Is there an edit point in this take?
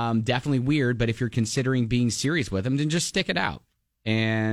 no; 0 cuts

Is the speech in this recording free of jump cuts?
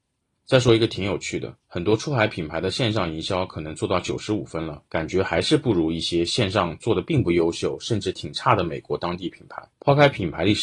no; 3 cuts; at 1.6 s, 4.9 s, 9.7 s

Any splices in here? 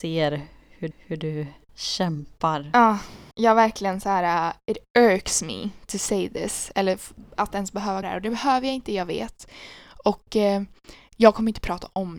yes; 3 cuts; at 0.9 s, 3.3 s, 8.0 s

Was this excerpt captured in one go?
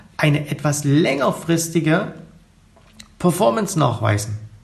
yes; 0 cuts

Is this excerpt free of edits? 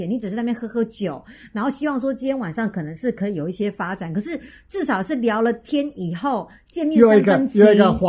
yes; 0 cuts

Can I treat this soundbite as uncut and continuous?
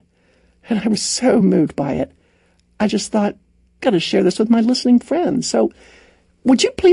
yes; 0 cuts

